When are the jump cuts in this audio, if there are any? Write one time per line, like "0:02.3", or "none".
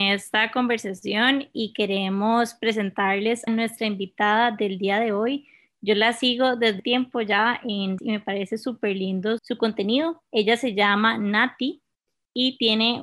0:03.5
0:06.8
0:08.0
0:09.4